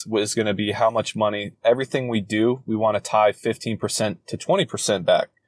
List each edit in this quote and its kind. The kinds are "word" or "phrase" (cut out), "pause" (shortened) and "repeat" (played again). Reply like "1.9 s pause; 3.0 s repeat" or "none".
none